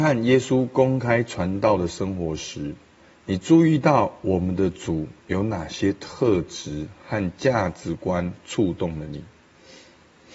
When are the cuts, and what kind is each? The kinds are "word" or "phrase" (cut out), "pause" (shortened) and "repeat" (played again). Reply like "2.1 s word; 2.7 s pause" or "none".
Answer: none